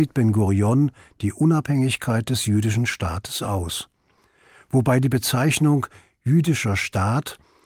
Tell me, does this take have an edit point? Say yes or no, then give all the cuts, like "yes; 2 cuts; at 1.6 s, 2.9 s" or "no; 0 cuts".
no; 0 cuts